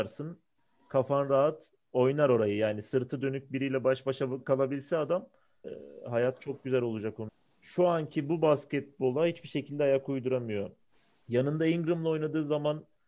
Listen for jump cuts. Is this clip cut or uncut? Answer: uncut